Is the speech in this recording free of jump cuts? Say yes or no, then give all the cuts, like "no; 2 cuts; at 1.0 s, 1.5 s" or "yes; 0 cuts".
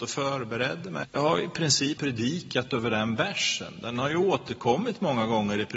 no; 2 cuts; at 1.0 s, 2.0 s